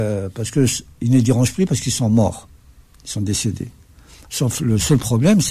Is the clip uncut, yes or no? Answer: yes